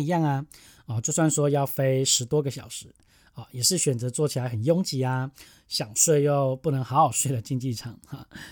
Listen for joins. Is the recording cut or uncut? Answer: uncut